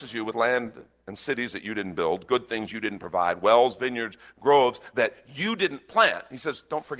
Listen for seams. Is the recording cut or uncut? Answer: uncut